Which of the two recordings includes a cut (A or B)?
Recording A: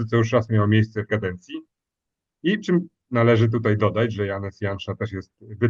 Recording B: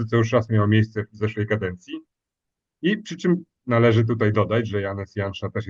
A